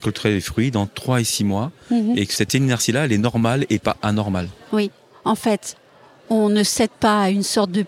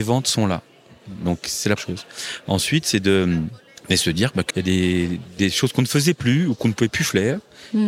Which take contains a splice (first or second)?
second